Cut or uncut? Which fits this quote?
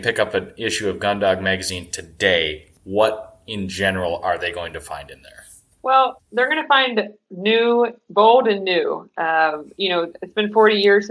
uncut